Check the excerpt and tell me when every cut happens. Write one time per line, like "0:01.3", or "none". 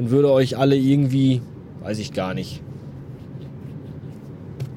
none